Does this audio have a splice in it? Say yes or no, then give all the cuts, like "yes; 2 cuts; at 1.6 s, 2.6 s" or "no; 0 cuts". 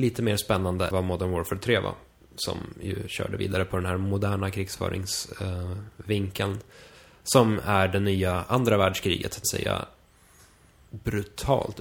yes; 3 cuts; at 0.9 s, 2.2 s, 9.4 s